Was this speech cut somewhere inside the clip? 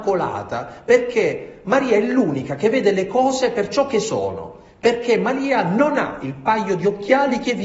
no; 0 cuts

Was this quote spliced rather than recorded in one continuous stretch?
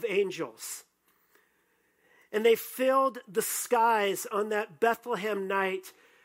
no; 0 cuts

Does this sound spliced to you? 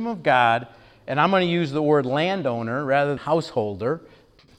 yes; 1 cut; at 3.2 s

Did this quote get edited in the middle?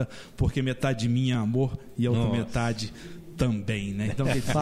no; 0 cuts

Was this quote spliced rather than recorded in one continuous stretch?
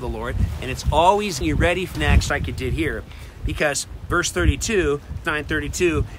yes; 5 cuts; at 1.4 s, 1.9 s, 2.3 s, 4.1 s, 5.2 s

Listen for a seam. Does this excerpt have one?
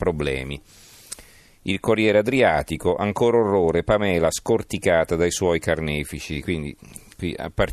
no; 0 cuts

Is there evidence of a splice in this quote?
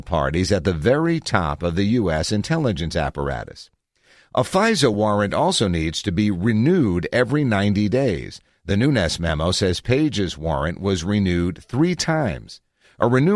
no; 0 cuts

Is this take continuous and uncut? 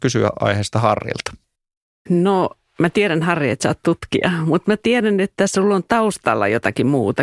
yes; 0 cuts

